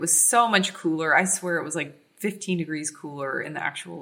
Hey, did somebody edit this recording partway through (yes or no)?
no